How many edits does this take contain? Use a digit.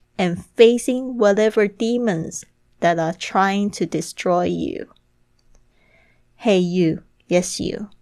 0